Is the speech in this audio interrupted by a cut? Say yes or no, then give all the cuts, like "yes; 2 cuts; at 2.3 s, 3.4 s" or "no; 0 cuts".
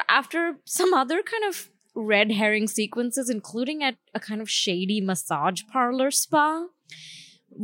no; 0 cuts